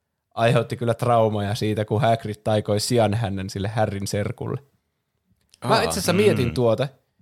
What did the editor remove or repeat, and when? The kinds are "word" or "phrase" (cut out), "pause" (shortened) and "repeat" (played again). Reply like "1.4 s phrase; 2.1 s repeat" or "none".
none